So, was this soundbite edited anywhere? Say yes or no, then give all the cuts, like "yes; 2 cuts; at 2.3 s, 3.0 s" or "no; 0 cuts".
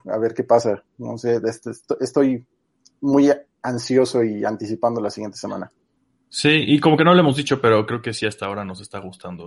no; 0 cuts